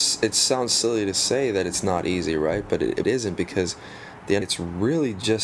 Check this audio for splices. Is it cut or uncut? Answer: cut